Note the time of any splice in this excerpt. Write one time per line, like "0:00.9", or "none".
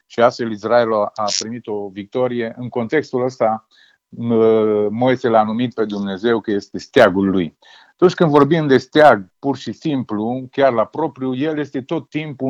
none